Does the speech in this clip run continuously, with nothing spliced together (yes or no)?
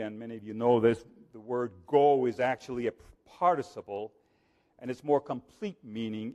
yes